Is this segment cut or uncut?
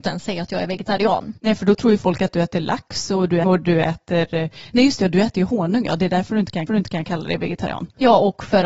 cut